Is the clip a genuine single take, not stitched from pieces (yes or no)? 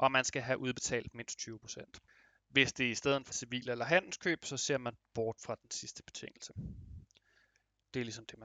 no